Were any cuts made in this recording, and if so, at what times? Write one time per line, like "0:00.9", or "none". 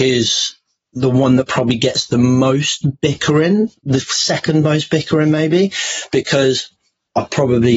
none